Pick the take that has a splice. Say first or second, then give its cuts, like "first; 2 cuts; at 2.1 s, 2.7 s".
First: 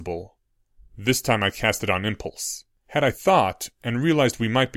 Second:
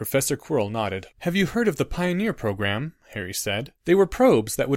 second; 2 cuts; at 1.1 s, 3.8 s